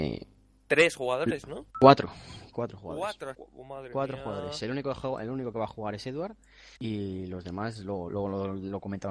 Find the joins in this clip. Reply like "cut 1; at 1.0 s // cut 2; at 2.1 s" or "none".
cut 1; at 1.7 s // cut 2; at 3.3 s // cut 3; at 6.8 s // cut 4; at 8.1 s